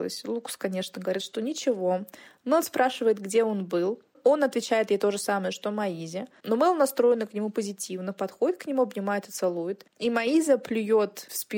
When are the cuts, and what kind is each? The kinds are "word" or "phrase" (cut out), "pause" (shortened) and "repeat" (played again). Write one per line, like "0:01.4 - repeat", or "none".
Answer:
none